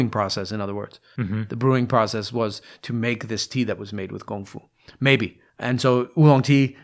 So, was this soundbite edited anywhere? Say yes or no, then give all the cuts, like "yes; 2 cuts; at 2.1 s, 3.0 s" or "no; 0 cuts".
yes; 1 cut; at 5.5 s